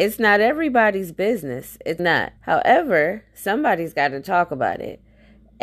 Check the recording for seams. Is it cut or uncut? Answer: cut